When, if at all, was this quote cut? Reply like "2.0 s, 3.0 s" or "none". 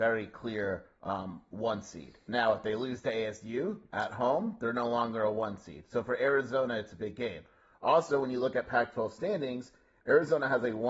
1.0 s